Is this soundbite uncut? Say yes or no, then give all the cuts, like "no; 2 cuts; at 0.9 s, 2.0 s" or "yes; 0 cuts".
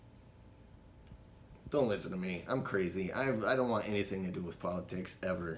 yes; 0 cuts